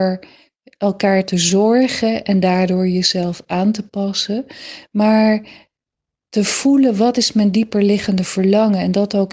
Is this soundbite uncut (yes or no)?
yes